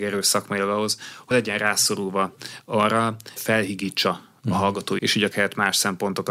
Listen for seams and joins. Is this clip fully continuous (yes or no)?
no